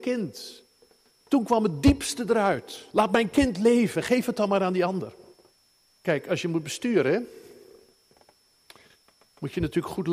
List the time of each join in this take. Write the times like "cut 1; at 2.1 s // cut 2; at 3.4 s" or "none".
cut 1; at 2.9 s // cut 2; at 5.5 s